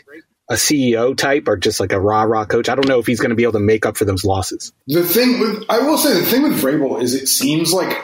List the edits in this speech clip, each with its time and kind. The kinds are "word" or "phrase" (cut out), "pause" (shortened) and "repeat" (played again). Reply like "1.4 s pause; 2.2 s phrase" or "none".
4.8 s pause

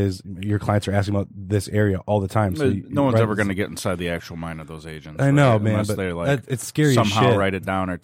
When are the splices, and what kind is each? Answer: none

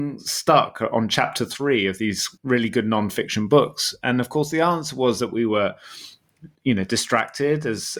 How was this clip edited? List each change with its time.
2.4 s pause; 6.5 s pause

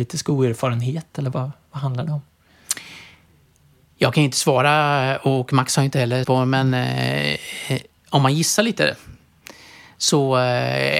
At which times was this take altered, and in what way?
1.3 s word; 6.2 s word

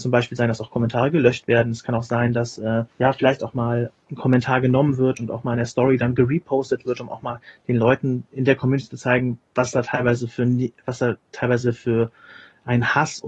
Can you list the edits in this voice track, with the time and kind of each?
2.9 s pause; 3.9 s word

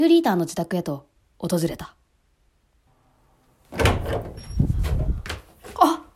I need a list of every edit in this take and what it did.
none

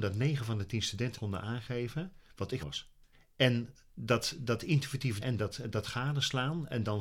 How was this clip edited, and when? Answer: 1.1 s word; 2.6 s phrase; 3.1 s pause; 5.2 s word

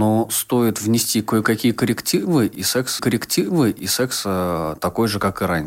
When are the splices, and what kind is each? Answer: 3.0 s repeat

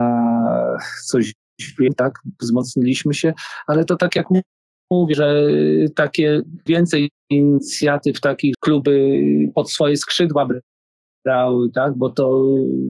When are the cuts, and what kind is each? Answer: 6.7 s word; 8.5 s word

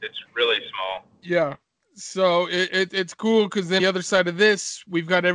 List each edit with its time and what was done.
1.1 s pause; 3.8 s phrase

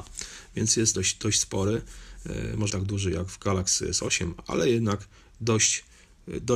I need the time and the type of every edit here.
0.9 s word; 2.7 s word

